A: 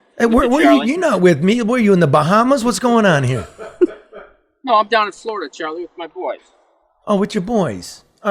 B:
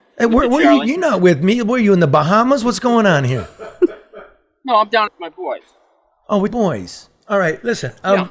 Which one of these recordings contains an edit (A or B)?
B